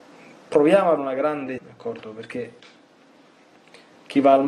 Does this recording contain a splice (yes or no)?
yes